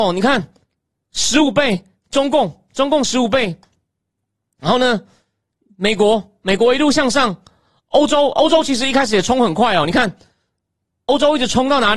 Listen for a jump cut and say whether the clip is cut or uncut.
uncut